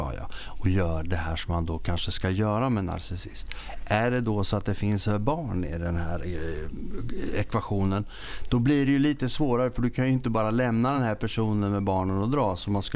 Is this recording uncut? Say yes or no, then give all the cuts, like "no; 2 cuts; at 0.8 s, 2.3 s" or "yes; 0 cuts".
yes; 0 cuts